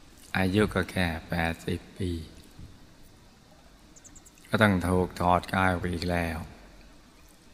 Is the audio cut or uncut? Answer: uncut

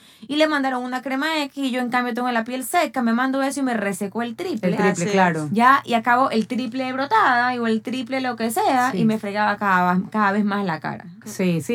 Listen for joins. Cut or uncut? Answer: uncut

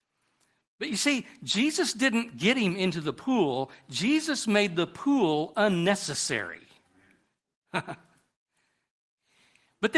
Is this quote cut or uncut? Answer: uncut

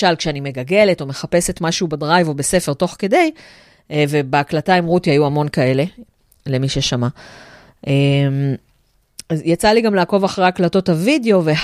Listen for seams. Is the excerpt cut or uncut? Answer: uncut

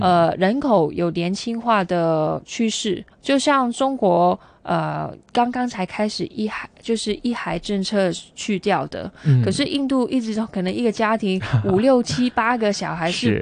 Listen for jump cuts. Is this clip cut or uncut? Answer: cut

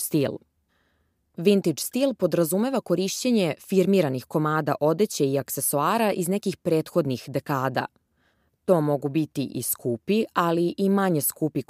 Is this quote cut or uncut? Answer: uncut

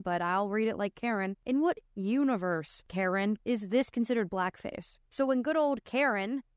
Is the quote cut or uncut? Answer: cut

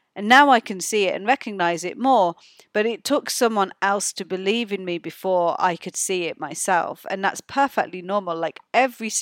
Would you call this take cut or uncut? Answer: uncut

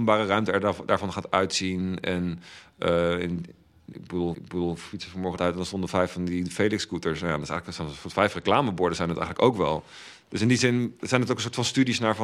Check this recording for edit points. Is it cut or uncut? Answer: cut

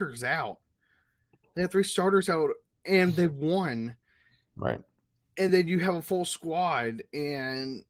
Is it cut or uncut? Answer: uncut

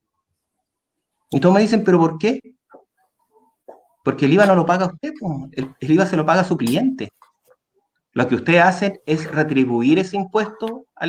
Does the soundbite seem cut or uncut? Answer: uncut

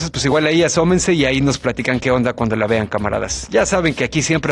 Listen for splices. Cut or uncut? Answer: uncut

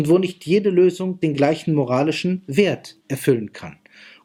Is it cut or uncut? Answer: cut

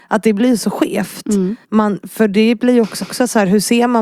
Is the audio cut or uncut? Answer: cut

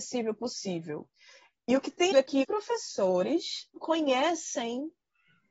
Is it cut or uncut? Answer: cut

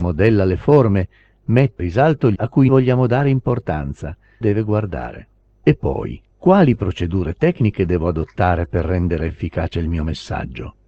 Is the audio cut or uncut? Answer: cut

